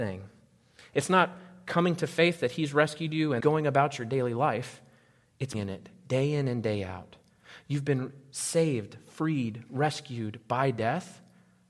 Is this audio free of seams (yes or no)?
no